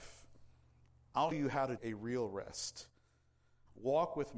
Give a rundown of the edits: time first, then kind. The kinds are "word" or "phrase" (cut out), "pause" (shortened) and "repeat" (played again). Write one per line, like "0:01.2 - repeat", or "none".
0:01.3 - word
0:01.8 - word